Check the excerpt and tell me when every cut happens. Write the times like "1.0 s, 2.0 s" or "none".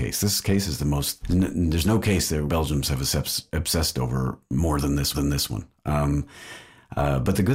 1.2 s, 2.5 s, 5.1 s